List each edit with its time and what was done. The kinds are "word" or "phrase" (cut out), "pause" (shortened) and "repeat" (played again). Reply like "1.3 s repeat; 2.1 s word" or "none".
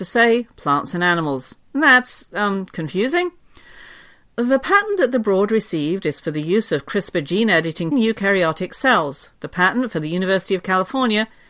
7.9 s phrase